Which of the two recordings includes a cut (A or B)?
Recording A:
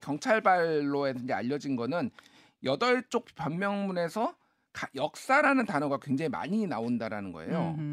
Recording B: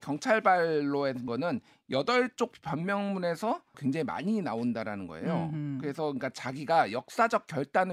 B